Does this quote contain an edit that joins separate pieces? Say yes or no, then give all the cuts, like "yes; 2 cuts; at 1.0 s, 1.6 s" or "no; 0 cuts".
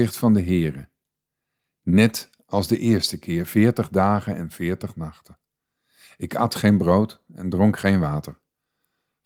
no; 0 cuts